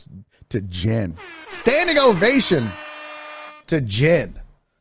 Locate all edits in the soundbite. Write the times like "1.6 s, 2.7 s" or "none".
3.6 s